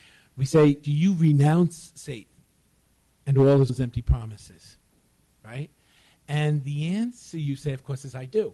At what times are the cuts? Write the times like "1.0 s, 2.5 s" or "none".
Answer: 3.7 s